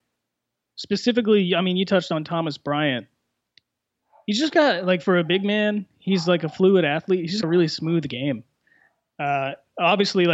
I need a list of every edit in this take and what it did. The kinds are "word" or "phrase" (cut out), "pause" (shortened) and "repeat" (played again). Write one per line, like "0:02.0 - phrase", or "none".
0:07.4 - word